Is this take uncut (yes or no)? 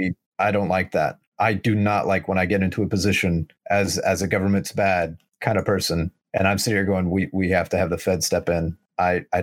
yes